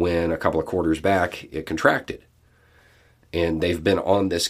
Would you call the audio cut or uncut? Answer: uncut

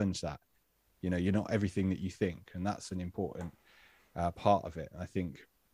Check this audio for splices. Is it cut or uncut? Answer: uncut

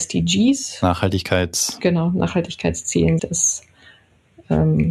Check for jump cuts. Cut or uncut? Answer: cut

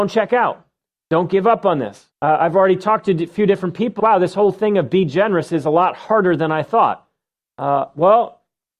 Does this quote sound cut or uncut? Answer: cut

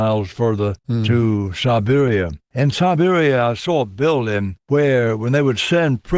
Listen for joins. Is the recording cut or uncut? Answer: cut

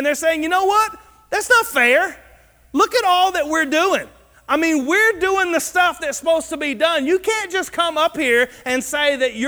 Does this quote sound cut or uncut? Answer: uncut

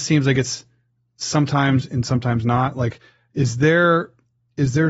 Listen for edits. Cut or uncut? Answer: uncut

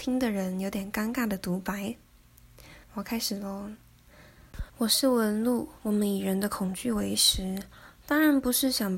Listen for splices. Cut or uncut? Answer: cut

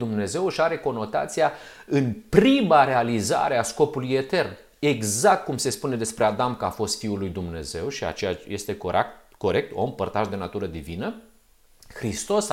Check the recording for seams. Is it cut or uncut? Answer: uncut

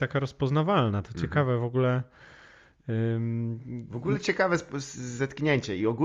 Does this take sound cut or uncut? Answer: uncut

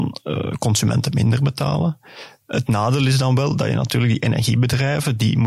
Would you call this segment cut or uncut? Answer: uncut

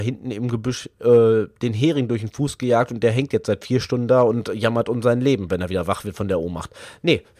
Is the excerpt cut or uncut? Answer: uncut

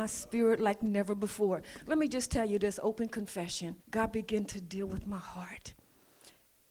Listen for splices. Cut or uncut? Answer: cut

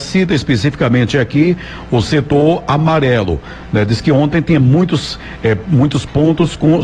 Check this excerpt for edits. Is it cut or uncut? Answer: uncut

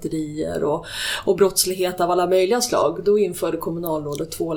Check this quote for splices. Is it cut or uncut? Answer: uncut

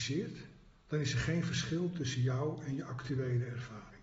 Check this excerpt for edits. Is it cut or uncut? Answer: uncut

